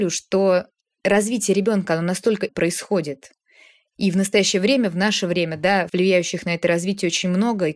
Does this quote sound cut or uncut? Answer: cut